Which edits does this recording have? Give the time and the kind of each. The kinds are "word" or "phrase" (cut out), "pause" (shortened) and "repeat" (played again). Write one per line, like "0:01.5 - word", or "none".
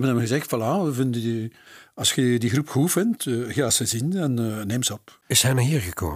none